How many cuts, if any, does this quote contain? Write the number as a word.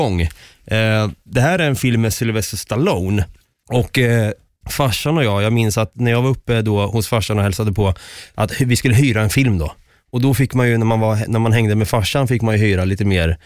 zero